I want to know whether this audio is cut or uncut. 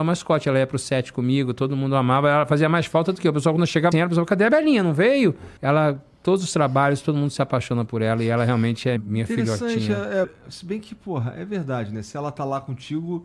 cut